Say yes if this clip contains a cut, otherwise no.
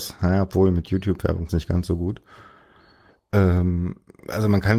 yes